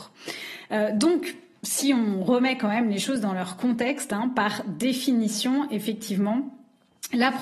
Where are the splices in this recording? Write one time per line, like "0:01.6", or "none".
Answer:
none